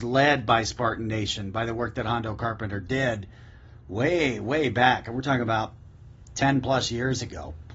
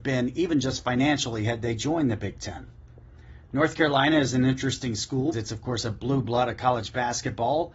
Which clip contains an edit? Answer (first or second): second